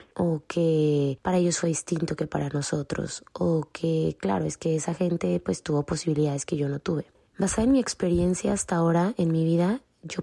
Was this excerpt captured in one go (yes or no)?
yes